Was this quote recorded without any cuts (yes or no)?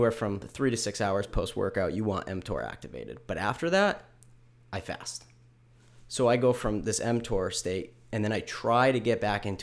yes